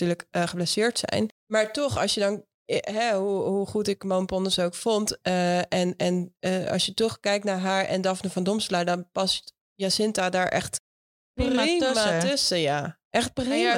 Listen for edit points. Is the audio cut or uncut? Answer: uncut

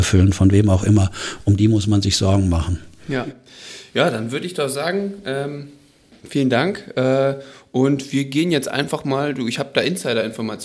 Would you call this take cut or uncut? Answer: uncut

